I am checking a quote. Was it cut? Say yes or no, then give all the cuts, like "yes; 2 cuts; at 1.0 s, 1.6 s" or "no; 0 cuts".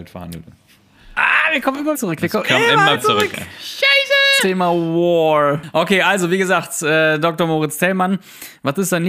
yes; 3 cuts; at 1.9 s, 2.9 s, 4.4 s